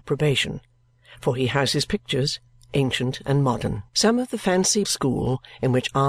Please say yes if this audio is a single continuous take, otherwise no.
no